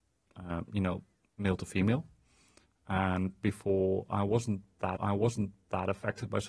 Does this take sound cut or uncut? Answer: cut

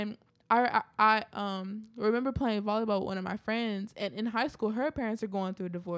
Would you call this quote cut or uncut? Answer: uncut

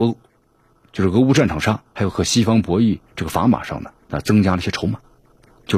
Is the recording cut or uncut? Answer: cut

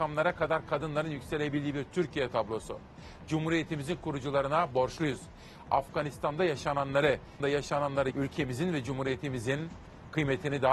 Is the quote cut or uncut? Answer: cut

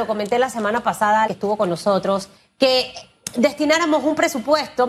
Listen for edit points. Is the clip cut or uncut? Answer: cut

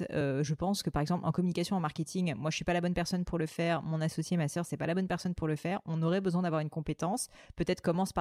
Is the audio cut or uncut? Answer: uncut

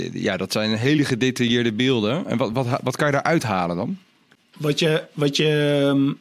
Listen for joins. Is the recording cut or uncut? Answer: uncut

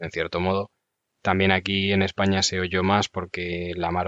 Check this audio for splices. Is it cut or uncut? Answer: uncut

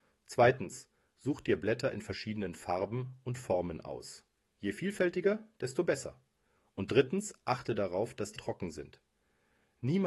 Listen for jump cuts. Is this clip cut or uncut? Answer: cut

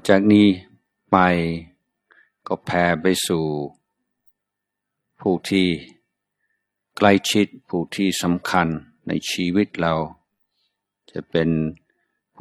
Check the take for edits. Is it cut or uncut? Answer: uncut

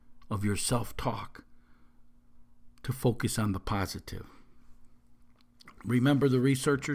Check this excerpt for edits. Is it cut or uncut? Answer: uncut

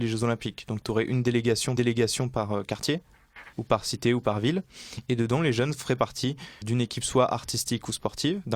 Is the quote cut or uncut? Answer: cut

